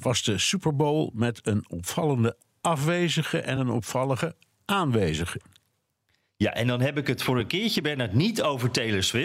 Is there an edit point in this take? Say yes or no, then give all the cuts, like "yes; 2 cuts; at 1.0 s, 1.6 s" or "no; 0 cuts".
no; 0 cuts